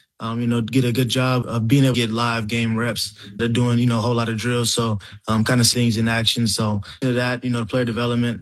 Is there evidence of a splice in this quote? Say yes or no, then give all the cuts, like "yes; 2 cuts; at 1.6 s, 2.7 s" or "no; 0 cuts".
yes; 5 cuts; at 1.4 s, 1.9 s, 3.4 s, 5.7 s, 7.0 s